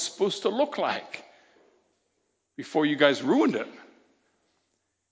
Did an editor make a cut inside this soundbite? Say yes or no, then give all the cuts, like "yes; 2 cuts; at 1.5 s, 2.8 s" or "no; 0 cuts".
no; 0 cuts